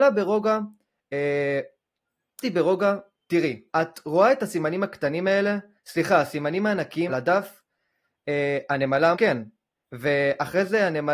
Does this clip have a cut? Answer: yes; 4 cuts; at 2.4 s, 3.7 s, 7.1 s, 9.1 s

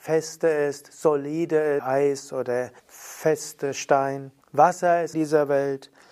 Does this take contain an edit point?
yes; 4 cuts; at 1.8 s, 2.8 s, 4.4 s, 5.1 s

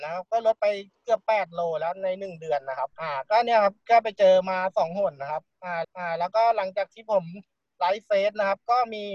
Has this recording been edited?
yes; 3 cuts; at 2.9 s, 3.8 s, 5.8 s

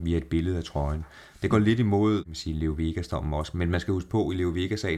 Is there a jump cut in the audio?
no; 0 cuts

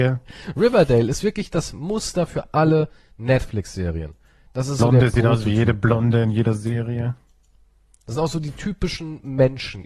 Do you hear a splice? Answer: no; 0 cuts

